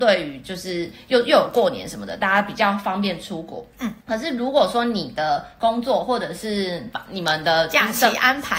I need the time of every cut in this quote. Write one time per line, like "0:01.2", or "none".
0:04.0